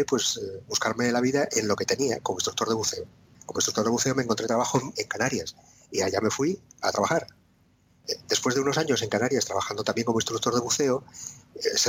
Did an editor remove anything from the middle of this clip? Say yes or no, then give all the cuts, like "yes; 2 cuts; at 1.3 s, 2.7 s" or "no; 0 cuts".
no; 0 cuts